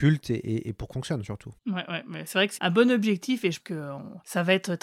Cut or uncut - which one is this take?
cut